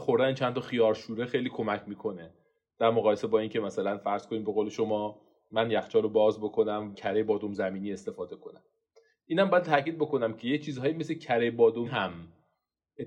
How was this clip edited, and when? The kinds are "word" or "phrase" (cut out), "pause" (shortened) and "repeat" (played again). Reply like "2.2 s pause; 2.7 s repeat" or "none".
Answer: 6.9 s word; 11.9 s word